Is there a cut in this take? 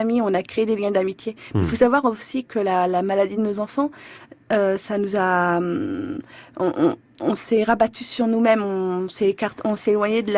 no; 0 cuts

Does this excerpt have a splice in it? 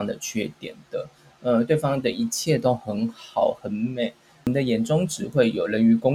no; 0 cuts

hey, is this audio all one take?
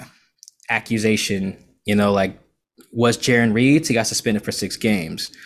yes; 0 cuts

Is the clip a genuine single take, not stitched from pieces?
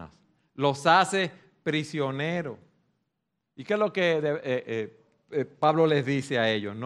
yes; 0 cuts

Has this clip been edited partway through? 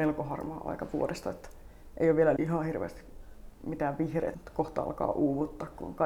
yes; 2 cuts; at 2.4 s, 4.3 s

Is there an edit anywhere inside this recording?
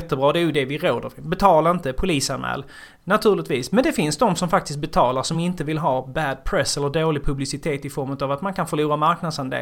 no; 0 cuts

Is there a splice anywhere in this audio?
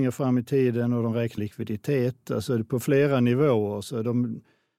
yes; 1 cut; at 1.4 s

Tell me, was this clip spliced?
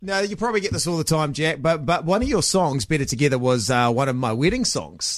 no; 0 cuts

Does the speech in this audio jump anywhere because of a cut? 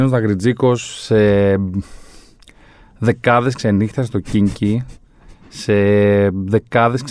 no; 0 cuts

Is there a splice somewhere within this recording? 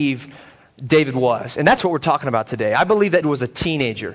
yes; 2 cuts; at 1.8 s, 3.2 s

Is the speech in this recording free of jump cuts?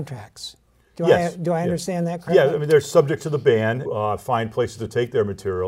no; 1 cut; at 3.9 s

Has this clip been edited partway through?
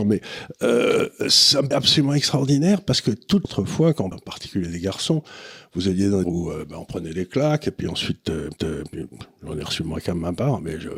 yes; 5 cuts; at 1.7 s, 3.4 s, 4.1 s, 6.2 s, 8.6 s

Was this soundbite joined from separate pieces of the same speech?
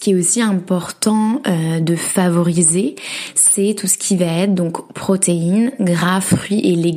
no; 0 cuts

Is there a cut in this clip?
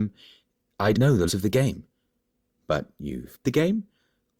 yes; 3 cuts; at 0.9 s, 1.3 s, 3.4 s

